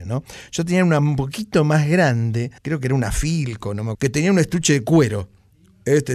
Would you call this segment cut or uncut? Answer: cut